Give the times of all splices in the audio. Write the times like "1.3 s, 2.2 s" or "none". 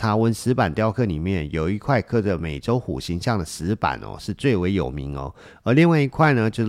none